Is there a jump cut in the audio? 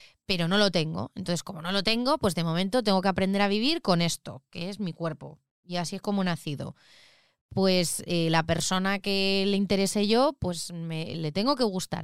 no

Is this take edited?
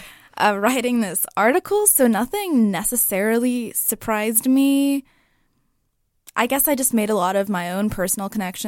no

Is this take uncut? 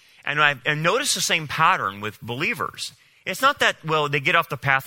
yes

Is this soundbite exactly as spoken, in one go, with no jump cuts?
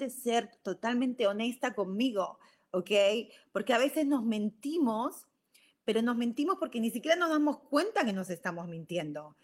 yes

